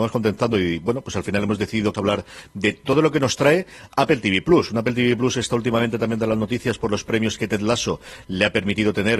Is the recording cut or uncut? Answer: cut